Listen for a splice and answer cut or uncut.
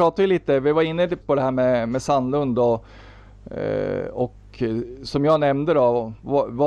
cut